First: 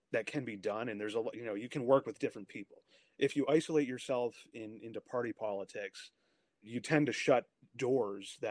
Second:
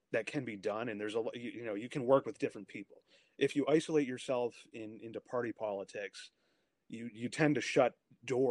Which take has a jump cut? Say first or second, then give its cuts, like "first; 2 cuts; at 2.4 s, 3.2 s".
first; 2 cuts; at 1.3 s, 6.6 s